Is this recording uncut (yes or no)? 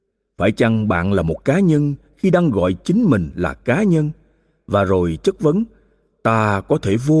yes